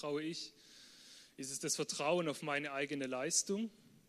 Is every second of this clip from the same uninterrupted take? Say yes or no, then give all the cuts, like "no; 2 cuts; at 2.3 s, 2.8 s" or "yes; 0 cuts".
yes; 0 cuts